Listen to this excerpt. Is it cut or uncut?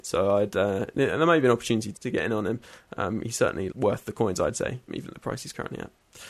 cut